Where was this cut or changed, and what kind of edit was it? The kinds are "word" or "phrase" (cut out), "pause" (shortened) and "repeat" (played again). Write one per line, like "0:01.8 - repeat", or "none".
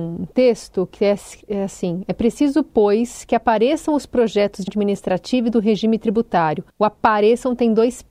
0:04.7 - word
0:06.7 - pause